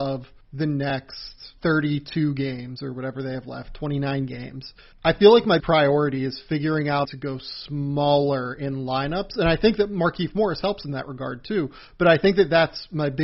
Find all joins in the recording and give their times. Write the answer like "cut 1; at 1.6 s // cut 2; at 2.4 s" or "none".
cut 1; at 1.6 s // cut 2; at 4.8 s // cut 3; at 5.6 s // cut 4; at 7.0 s